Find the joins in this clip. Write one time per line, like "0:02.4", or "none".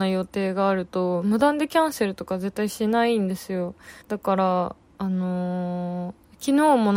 0:04.0